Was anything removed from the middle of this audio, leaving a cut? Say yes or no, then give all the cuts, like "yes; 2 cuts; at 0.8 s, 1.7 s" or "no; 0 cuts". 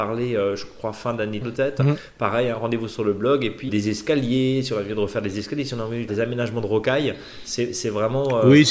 yes; 3 cuts; at 1.4 s, 3.7 s, 6.1 s